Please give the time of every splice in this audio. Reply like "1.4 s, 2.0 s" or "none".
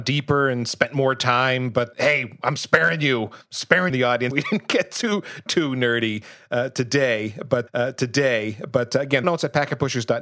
1.9 s, 3.9 s, 4.3 s, 5.5 s, 7.7 s, 9.2 s